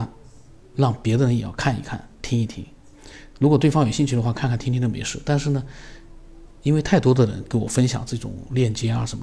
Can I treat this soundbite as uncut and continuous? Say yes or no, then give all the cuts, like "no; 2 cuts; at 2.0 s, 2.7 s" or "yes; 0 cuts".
no; 1 cut; at 2.1 s